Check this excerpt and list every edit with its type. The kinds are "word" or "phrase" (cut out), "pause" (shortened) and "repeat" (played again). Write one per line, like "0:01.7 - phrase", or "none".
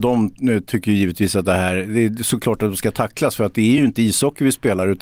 none